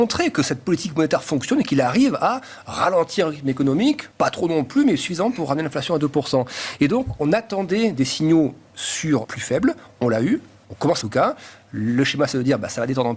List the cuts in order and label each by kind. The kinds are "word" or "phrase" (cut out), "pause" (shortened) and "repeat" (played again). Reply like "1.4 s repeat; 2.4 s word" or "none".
4.1 s pause; 9.2 s phrase; 11.0 s phrase